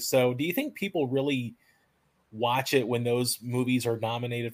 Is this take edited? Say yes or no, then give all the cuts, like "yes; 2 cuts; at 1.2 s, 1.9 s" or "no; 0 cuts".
no; 0 cuts